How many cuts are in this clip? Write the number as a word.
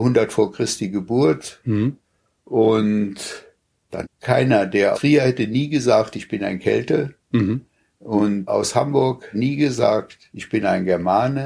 four